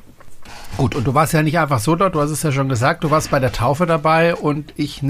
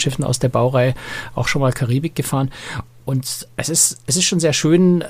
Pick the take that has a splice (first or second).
second